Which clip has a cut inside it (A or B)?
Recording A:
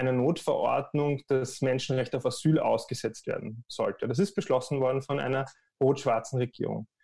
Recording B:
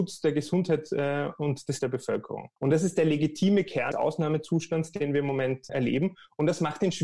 B